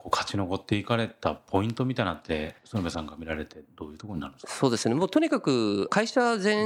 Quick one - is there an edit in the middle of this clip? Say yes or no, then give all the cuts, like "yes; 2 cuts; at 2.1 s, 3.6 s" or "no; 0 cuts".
yes; 1 cut; at 2.6 s